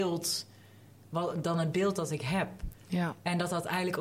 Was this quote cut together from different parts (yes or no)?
no